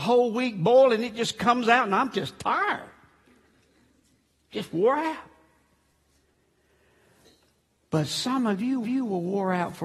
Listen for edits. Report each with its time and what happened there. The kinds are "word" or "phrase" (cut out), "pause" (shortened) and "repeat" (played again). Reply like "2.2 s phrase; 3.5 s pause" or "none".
8.8 s repeat